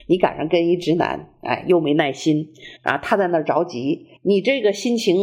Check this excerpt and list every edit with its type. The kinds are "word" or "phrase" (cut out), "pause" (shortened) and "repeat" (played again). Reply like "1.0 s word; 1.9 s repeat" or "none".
2.8 s pause; 4.2 s pause